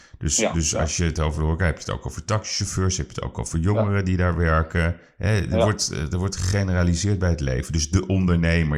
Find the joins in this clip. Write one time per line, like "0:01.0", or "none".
none